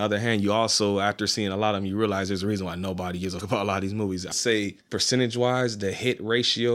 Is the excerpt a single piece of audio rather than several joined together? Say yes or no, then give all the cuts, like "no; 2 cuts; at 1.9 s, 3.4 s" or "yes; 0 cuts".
no; 3 cuts; at 3.4 s, 4.3 s, 4.8 s